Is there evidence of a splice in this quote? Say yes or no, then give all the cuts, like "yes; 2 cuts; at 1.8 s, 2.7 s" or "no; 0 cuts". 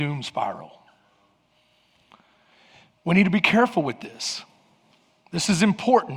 no; 0 cuts